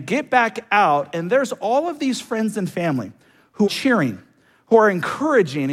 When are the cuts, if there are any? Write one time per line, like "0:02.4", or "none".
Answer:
0:03.6